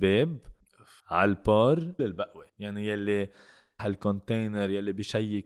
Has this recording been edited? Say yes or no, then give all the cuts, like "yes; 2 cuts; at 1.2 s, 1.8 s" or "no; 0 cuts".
yes; 3 cuts; at 2.0 s, 2.5 s, 3.8 s